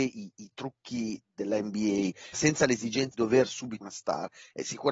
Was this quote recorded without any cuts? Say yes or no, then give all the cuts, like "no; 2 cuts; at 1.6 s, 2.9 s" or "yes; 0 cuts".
no; 3 cuts; at 2.3 s, 3.1 s, 3.8 s